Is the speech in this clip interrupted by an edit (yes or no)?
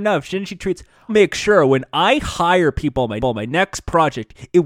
yes